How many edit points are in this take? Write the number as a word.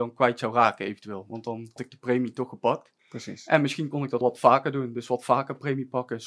three